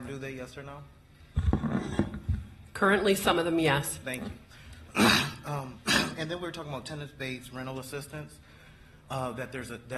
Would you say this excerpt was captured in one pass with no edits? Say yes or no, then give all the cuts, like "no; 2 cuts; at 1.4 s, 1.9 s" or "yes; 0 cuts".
yes; 0 cuts